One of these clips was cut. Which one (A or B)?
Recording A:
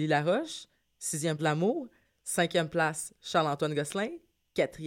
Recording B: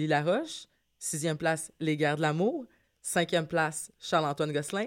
A